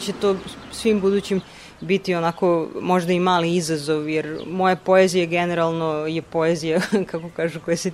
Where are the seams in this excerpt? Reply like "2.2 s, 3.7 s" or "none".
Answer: 1.4 s